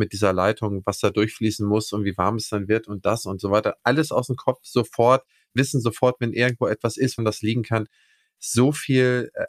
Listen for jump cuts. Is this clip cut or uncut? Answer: cut